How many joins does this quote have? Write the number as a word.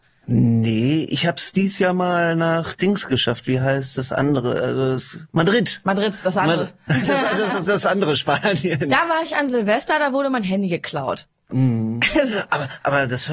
zero